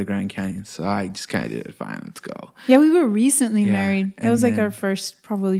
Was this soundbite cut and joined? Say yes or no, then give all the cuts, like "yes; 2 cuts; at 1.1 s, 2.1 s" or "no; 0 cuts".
no; 0 cuts